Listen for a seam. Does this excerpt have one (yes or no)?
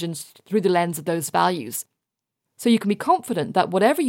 no